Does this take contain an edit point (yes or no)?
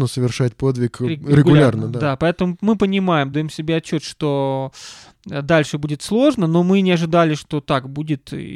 no